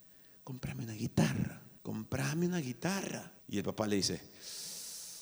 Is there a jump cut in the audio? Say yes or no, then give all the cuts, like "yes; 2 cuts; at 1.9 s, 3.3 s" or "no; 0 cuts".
yes; 2 cuts; at 1.8 s, 3.4 s